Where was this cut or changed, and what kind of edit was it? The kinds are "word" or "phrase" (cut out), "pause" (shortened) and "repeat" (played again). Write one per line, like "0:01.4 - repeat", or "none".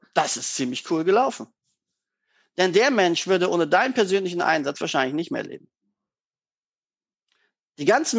none